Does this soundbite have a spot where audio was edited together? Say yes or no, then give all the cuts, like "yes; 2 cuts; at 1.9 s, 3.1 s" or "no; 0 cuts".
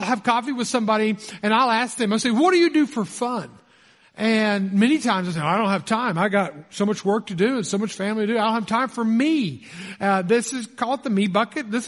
no; 0 cuts